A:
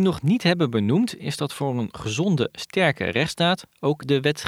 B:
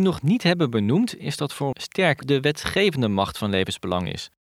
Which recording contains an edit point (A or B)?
B